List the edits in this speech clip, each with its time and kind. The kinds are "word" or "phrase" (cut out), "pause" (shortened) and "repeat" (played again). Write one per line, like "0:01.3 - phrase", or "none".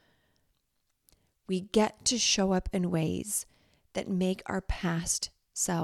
none